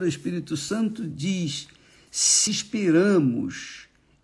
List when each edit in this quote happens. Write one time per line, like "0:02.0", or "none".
0:02.5